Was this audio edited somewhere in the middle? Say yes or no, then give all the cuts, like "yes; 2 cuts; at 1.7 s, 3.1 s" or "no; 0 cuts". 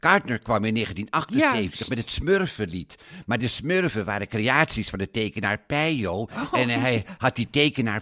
no; 0 cuts